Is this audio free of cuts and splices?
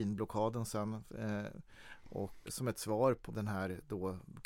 no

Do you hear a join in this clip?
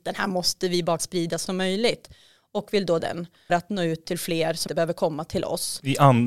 yes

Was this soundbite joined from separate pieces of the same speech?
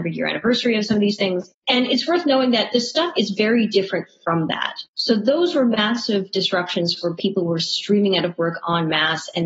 yes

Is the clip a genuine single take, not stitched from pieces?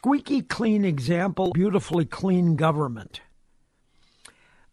no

